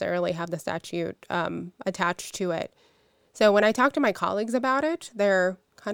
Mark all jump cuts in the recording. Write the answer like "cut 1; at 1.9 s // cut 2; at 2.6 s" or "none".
none